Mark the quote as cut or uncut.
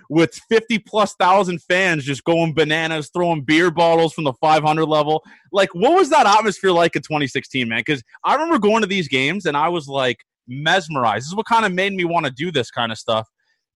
uncut